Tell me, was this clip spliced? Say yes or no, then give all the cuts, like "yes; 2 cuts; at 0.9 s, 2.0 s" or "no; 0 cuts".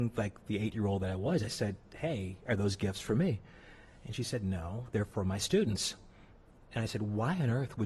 no; 0 cuts